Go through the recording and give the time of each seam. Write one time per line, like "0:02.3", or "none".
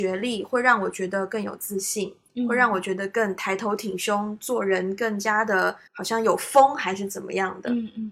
0:05.9